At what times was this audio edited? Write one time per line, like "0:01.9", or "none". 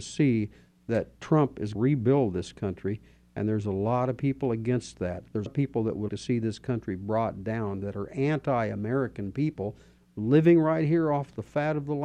0:01.7
0:05.5
0:06.1